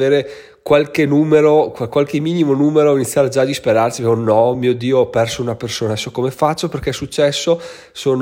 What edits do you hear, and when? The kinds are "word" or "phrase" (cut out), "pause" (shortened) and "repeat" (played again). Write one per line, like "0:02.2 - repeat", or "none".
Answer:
none

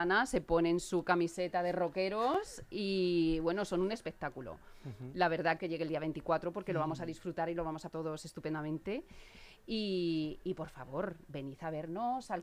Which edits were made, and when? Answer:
0:05.6 - phrase
0:07.9 - word

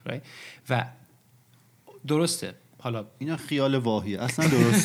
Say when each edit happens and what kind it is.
none

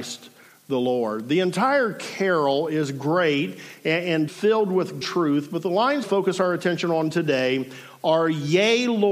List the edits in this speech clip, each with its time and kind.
0:04.3 - word
0:05.0 - word
0:06.0 - phrase

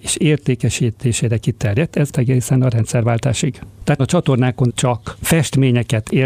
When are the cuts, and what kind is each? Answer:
0:02.1 - word
0:04.0 - word
0:04.7 - word

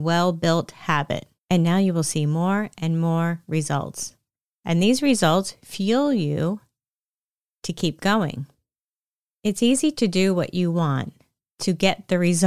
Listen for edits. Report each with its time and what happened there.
0:01.4 - pause

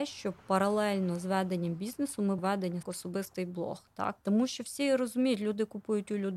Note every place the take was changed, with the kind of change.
0:02.4 - word
0:02.8 - phrase

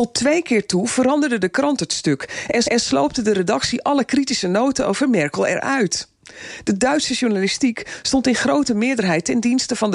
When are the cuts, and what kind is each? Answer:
0:02.6 - repeat

